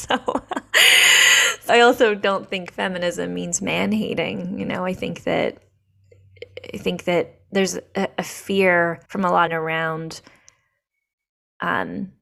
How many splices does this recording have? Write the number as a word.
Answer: three